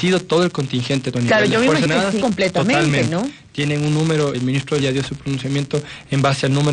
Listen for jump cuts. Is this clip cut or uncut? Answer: cut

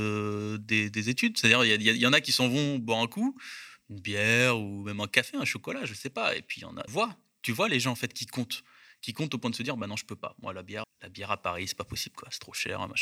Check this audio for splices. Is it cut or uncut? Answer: cut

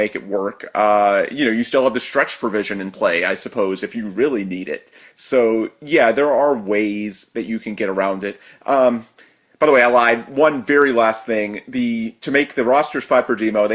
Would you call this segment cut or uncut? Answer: uncut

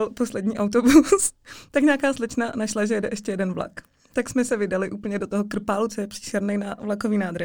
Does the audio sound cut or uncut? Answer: uncut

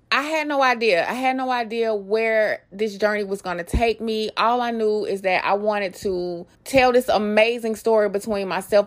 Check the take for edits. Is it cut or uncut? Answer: cut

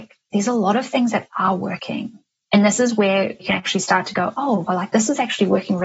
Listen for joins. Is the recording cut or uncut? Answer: uncut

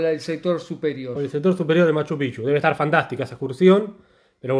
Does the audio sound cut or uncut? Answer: uncut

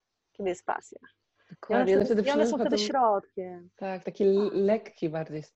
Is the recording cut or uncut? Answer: uncut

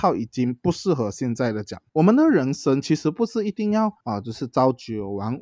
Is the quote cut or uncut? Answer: cut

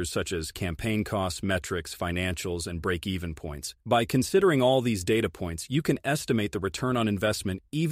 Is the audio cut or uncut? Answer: cut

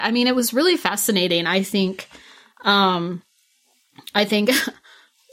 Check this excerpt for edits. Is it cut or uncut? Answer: uncut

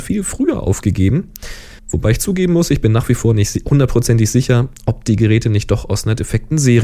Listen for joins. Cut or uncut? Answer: cut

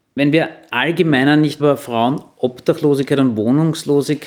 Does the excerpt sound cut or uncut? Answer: cut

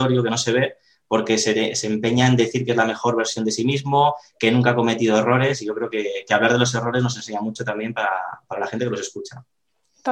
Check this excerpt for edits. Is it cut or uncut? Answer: uncut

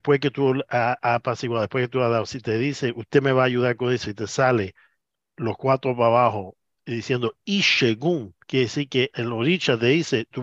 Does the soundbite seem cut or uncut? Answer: cut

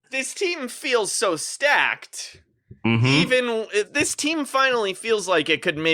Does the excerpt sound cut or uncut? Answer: cut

